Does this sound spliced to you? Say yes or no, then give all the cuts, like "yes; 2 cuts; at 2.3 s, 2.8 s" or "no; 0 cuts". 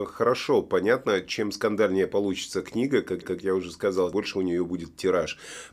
yes; 2 cuts; at 3.2 s, 4.1 s